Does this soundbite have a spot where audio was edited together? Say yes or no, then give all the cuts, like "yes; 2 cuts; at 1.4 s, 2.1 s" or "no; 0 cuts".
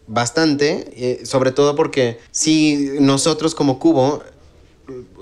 yes; 1 cut; at 2.3 s